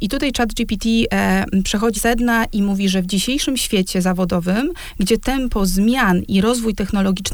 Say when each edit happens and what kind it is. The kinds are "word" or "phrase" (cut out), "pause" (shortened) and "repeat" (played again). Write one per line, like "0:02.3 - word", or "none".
0:02.0 - word